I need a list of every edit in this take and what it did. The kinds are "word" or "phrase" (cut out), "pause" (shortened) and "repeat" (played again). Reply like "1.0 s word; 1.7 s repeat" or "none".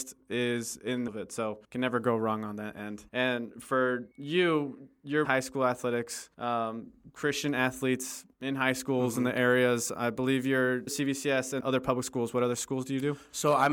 1.1 s word; 1.6 s pause; 3.1 s pause; 4.1 s pause; 5.2 s phrase; 6.3 s pause; 8.3 s pause; 10.9 s word; 11.6 s word